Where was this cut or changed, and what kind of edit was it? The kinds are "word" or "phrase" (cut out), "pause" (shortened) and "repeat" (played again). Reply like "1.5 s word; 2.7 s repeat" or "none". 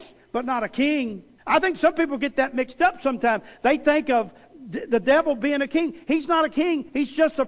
1.4 s pause

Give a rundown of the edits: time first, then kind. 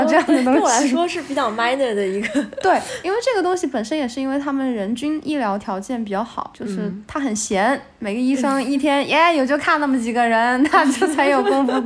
none

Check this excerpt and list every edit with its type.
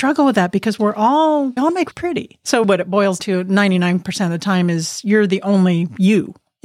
1.6 s word; 1.9 s word; 2.6 s word; 3.2 s word

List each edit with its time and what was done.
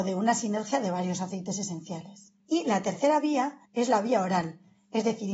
2.4 s pause; 3.7 s pause

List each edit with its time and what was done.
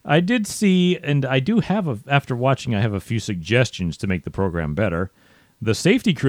none

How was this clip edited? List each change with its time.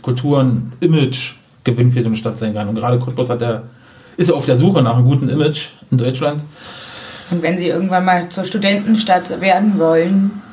none

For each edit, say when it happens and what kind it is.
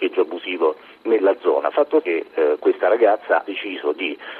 2.0 s word; 3.4 s word

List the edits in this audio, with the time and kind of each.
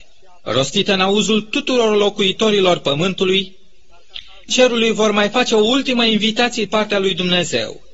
4.5 s word; 6.7 s word

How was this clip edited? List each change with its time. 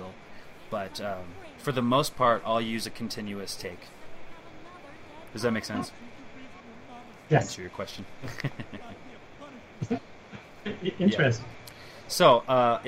none

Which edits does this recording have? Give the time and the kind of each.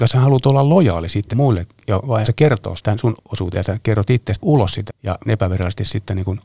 1.3 s word; 2.2 s word; 2.8 s word; 3.2 s word; 3.5 s word; 4.4 s word; 4.9 s word; 5.3 s word

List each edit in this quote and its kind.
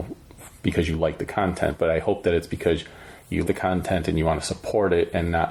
3.5 s word

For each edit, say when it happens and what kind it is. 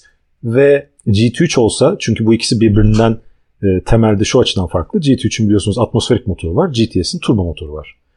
1.0 s pause

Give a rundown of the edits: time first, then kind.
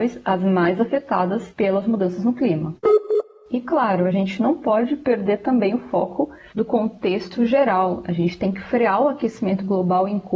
none

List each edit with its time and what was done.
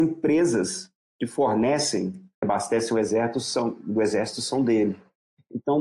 2.4 s phrase

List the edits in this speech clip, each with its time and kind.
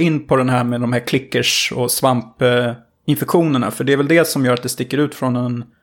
none

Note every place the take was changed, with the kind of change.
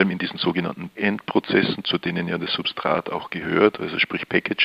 1.0 s word

